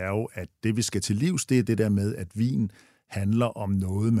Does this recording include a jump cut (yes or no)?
no